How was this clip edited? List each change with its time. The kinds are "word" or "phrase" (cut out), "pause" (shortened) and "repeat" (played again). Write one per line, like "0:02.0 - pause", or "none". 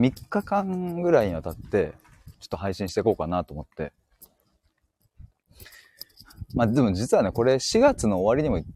0:02.3 - pause